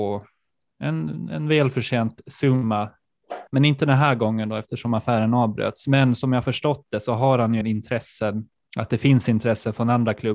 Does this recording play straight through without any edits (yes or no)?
no